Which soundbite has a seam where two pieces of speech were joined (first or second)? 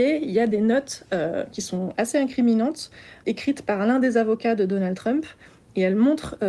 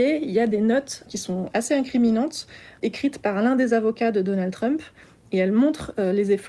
second